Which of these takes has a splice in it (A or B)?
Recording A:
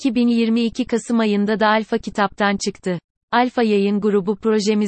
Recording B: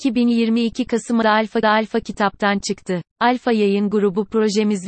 B